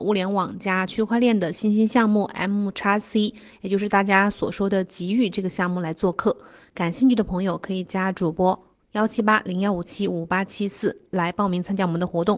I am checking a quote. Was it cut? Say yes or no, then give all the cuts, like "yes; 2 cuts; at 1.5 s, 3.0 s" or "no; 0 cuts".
no; 0 cuts